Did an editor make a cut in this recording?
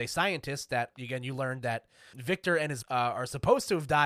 yes; 3 cuts; at 0.9 s, 2.1 s, 2.8 s

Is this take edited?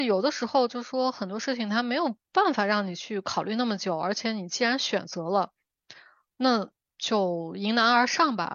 no; 0 cuts

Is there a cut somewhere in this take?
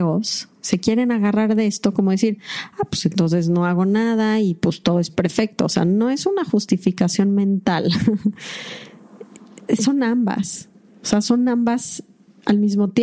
no; 0 cuts

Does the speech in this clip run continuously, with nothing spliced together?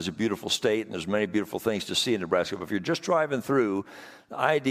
yes; 0 cuts

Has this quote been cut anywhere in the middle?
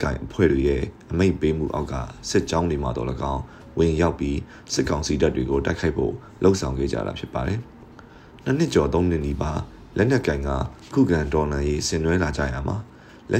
yes; 1 cut; at 7.9 s

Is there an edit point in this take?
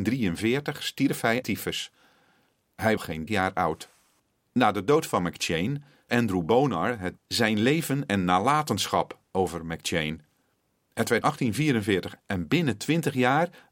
yes; 8 cuts; at 1.4 s, 3.0 s, 3.3 s, 4.2 s, 6.1 s, 7.2 s, 11.2 s, 12.2 s

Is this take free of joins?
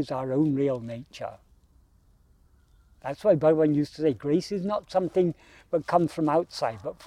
yes; 0 cuts

